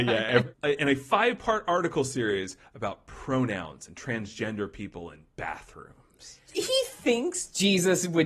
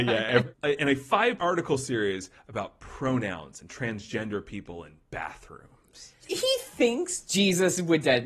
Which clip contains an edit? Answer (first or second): second